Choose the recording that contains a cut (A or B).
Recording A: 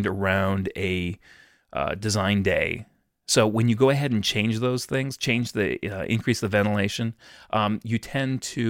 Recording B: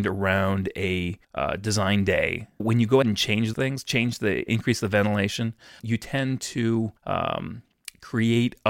B